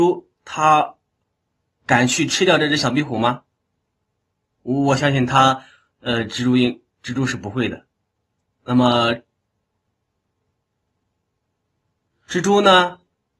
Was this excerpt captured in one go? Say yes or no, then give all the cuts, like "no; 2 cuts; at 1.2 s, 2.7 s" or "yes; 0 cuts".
yes; 0 cuts